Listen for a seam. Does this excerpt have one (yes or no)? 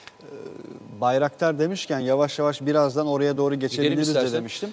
no